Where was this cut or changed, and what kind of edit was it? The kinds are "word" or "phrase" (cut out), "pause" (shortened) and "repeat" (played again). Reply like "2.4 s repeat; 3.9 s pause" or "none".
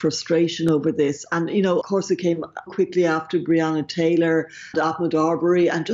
1.8 s word; 2.7 s word; 4.7 s word